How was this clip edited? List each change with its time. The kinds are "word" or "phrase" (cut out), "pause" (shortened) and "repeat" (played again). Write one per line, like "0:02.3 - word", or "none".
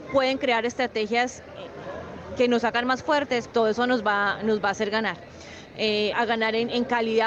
0:03.5 - word
0:06.1 - word